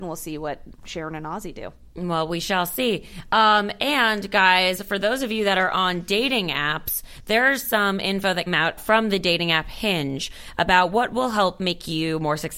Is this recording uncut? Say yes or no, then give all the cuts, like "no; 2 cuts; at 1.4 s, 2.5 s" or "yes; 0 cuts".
no; 2 cuts; at 8.5 s, 8.8 s